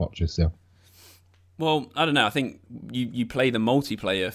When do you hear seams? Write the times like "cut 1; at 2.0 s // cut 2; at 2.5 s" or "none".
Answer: none